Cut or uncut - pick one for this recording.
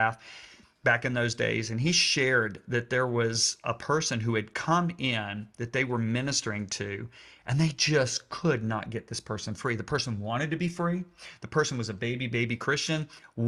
uncut